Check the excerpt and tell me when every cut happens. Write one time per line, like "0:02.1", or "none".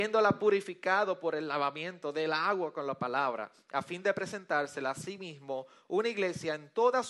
none